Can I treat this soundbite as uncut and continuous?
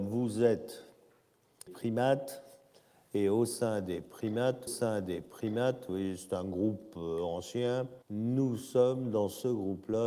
no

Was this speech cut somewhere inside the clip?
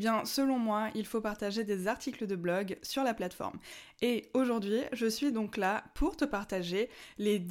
no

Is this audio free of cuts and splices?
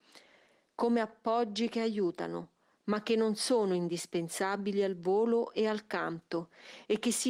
yes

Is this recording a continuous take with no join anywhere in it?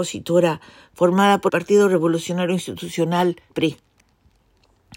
no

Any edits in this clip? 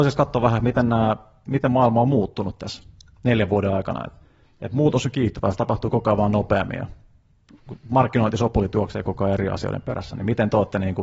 no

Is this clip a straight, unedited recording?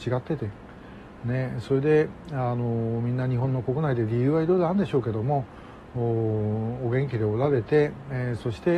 yes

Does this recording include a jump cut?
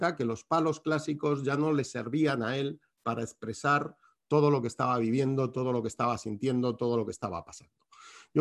no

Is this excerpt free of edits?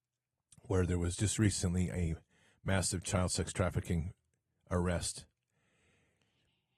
yes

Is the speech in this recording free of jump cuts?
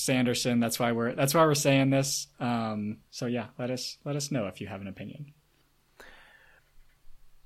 no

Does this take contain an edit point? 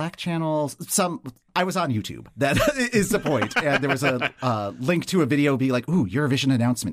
no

